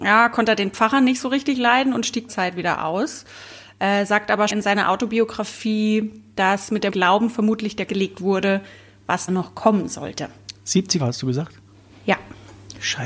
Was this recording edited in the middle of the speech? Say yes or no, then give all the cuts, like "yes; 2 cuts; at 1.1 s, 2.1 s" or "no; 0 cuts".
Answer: yes; 6 cuts; at 2.3 s, 4.5 s, 6.9 s, 7.9 s, 9.3 s, 11.0 s